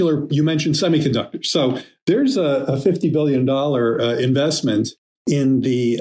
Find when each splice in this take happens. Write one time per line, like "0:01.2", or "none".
none